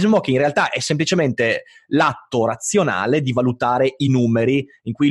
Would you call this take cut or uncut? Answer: uncut